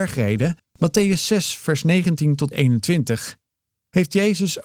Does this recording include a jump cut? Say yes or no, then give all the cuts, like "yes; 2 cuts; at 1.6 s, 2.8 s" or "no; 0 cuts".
yes; 1 cut; at 2.5 s